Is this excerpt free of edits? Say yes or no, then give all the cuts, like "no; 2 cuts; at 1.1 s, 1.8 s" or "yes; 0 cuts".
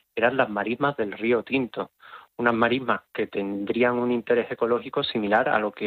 yes; 0 cuts